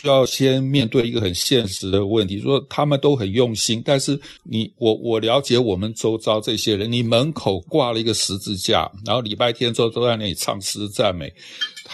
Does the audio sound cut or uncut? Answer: cut